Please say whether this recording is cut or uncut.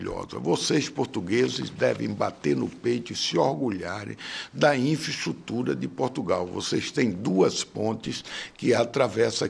uncut